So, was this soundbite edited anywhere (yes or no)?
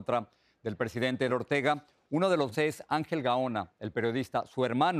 yes